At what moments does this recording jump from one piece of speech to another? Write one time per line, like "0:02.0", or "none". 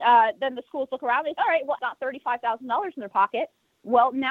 0:01.4
0:01.8